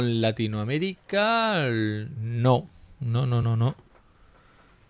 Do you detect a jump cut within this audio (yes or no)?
yes